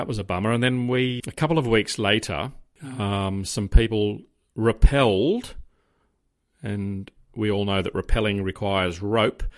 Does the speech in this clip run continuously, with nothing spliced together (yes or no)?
no